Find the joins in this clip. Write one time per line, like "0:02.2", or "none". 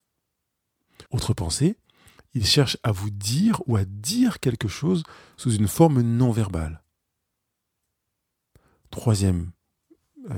0:01.1